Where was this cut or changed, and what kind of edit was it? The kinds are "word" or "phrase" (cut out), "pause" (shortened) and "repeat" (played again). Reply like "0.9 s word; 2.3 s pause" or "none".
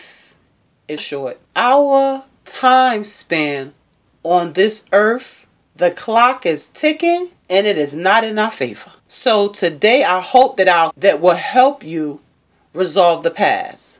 1.0 s word; 1.5 s pause; 5.6 s pause; 7.4 s pause; 9.0 s pause; 10.9 s phrase